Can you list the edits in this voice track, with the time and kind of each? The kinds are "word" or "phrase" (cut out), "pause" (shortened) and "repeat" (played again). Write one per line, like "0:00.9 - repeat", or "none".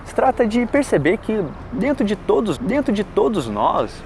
0:02.6 - repeat